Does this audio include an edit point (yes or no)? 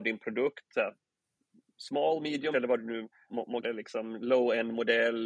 yes